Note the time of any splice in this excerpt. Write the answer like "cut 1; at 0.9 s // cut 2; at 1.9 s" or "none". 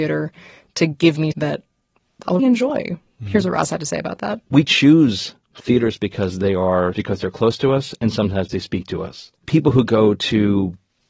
cut 1; at 1.3 s // cut 2; at 2.4 s // cut 3; at 6.9 s // cut 4; at 8.5 s